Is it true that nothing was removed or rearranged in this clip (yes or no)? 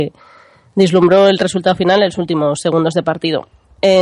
yes